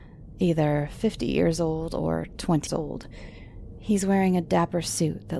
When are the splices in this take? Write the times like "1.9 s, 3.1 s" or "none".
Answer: 2.7 s